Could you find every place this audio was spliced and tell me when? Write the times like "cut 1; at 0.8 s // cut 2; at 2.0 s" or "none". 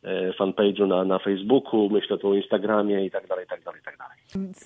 none